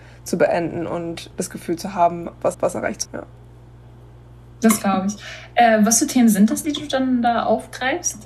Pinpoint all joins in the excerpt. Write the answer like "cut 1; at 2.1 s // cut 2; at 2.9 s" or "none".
cut 1; at 1.3 s // cut 2; at 2.5 s // cut 3; at 3.0 s // cut 4; at 6.6 s